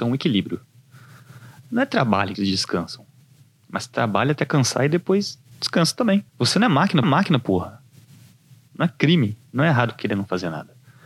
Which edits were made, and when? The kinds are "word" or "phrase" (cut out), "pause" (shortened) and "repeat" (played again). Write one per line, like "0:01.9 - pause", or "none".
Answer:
0:02.3 - word
0:05.5 - pause
0:06.3 - pause
0:07.0 - repeat